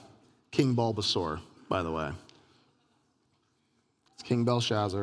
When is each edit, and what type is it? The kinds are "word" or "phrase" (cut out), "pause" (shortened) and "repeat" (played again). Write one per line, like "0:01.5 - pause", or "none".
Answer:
none